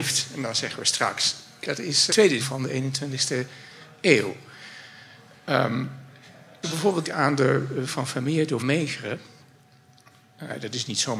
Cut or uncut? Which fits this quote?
cut